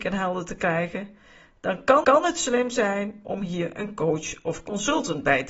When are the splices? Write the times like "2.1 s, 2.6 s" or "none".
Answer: 2.0 s